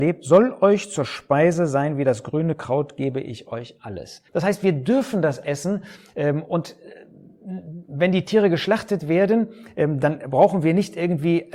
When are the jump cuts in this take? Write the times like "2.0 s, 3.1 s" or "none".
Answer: 4.3 s